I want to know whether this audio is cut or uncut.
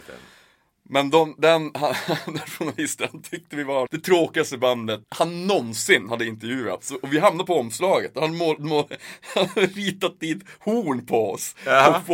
cut